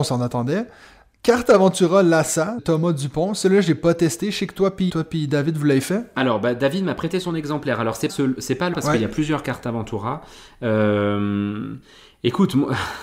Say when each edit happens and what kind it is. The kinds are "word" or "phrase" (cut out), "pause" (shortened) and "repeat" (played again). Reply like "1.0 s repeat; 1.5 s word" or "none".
2.6 s word; 4.9 s word; 8.1 s word; 8.7 s word